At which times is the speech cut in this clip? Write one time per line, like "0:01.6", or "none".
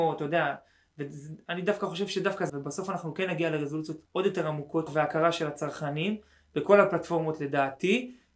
0:02.5
0:04.1
0:04.9